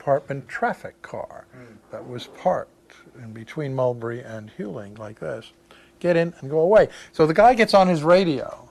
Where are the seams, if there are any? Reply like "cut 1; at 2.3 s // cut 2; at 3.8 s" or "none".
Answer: none